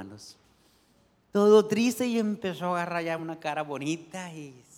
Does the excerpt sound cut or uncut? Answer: uncut